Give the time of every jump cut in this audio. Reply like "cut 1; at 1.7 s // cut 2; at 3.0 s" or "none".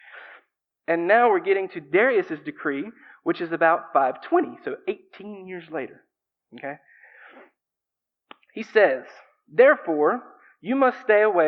none

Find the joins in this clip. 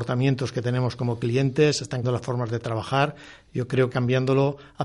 cut 1; at 2.0 s // cut 2; at 3.9 s

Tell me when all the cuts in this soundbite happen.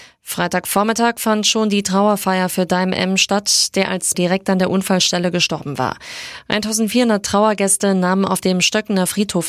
cut 1; at 4.1 s

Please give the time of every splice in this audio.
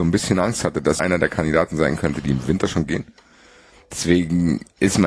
cut 1; at 1.0 s

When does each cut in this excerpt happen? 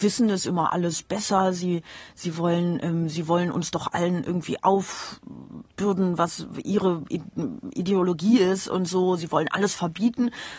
none

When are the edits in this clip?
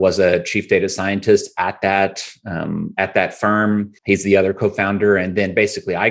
cut 1; at 4.0 s

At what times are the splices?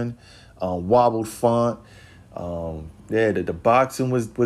cut 1; at 3.0 s

